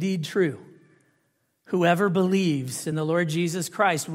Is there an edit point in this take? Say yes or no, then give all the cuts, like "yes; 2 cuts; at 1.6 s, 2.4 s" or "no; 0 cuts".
no; 0 cuts